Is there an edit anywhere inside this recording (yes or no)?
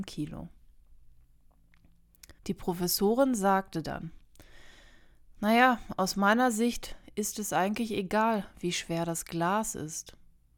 yes